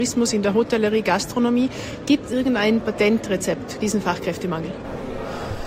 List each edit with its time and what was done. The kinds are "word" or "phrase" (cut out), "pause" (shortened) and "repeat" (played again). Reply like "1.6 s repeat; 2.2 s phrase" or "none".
2.3 s word; 3.8 s word